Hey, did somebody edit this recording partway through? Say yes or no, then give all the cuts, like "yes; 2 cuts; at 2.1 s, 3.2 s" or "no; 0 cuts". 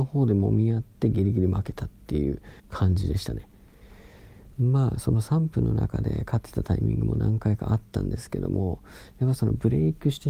yes; 1 cut; at 2.6 s